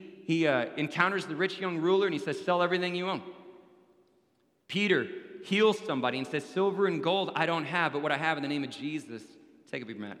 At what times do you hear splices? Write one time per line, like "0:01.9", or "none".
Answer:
none